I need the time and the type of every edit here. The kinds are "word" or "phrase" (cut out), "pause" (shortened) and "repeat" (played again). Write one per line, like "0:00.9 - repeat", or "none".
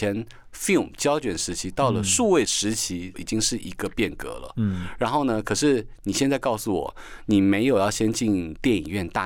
0:03.1 - phrase